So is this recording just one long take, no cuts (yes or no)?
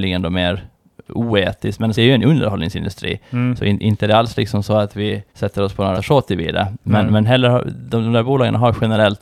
no